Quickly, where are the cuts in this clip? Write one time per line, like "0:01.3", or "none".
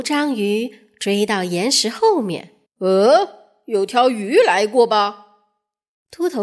0:02.6